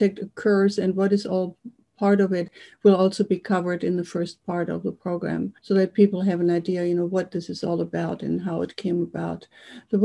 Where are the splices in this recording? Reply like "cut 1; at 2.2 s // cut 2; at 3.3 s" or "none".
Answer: cut 1; at 5.6 s